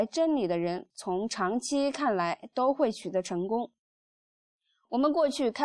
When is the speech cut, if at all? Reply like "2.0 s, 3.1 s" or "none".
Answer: none